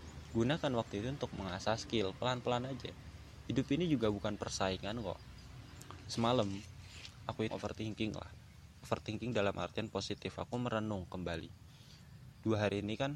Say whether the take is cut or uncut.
cut